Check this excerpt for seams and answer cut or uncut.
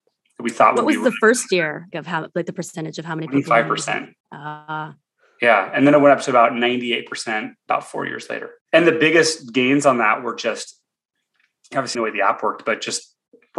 cut